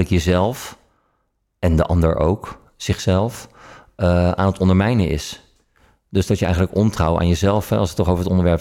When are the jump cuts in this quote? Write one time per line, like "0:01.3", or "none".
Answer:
none